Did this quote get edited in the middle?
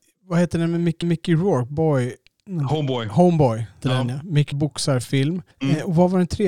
yes; 4 cuts; at 1.0 s, 3.8 s, 4.5 s, 5.5 s

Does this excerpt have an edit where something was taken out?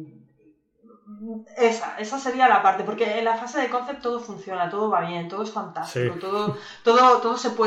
no; 0 cuts

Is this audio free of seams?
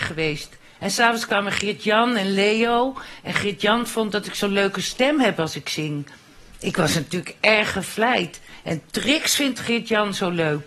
yes; 0 cuts

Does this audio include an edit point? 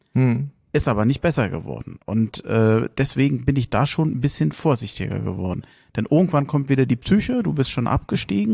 no; 0 cuts

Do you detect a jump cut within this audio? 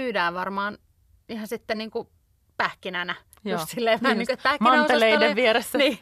no; 0 cuts

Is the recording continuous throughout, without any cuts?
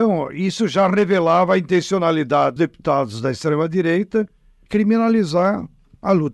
no; 2 cuts; at 2.6 s, 4.7 s

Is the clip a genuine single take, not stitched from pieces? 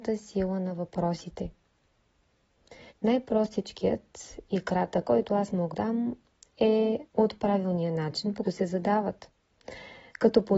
no; 5 cuts; at 2.9 s, 5.0 s, 5.7 s, 7.1 s, 8.4 s

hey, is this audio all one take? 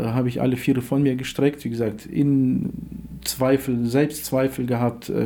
yes; 0 cuts

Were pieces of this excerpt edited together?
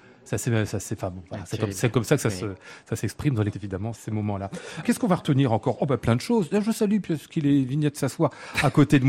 yes; 3 cuts; at 3.5 s, 4.0 s, 4.8 s

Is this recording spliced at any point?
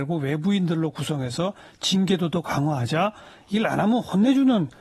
no; 0 cuts

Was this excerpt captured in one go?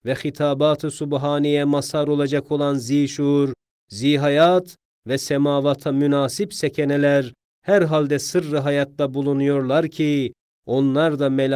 yes; 0 cuts

